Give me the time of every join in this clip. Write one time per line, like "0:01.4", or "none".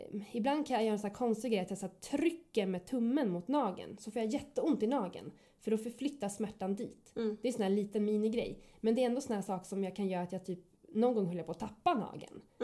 none